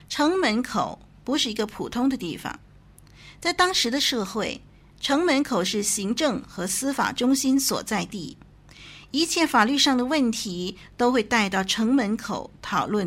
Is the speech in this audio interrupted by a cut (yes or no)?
no